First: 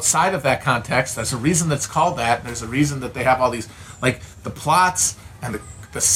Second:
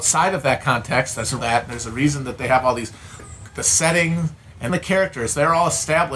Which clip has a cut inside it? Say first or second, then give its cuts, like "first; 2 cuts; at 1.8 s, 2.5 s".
second; 3 cuts; at 1.4 s, 3.2 s, 4.7 s